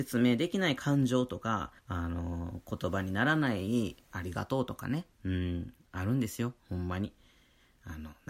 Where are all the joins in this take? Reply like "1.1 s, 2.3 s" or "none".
1.8 s, 5.1 s, 6.6 s

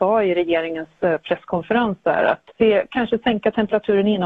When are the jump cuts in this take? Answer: 2.5 s

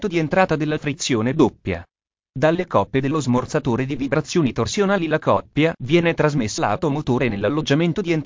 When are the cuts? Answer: 6.6 s

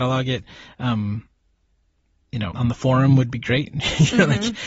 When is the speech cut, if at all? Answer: 2.5 s

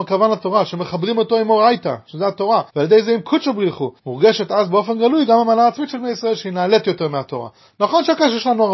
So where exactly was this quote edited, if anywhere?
2.7 s, 4.0 s

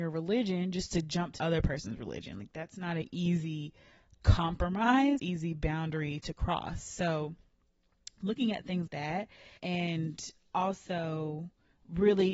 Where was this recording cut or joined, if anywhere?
1.4 s, 5.2 s, 8.9 s, 9.6 s

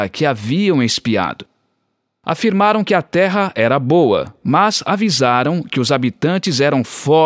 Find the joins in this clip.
none

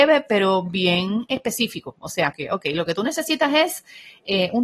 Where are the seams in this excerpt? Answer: 2.3 s

